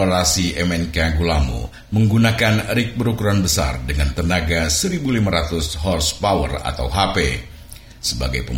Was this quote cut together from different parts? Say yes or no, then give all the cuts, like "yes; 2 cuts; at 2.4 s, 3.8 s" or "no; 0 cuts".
no; 0 cuts